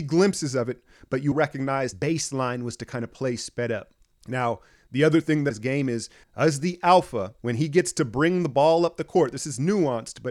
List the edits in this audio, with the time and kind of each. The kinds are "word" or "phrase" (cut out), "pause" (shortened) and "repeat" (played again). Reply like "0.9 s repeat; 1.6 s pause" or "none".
1.3 s word; 1.9 s word; 4.1 s pause; 5.5 s phrase; 6.2 s phrase; 7.4 s pause